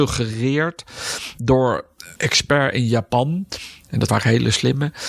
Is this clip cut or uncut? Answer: cut